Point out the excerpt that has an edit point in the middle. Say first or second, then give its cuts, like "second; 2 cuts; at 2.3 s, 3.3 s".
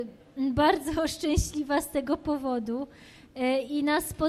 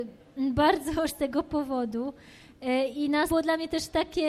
second; 2 cuts; at 1.1 s, 3.3 s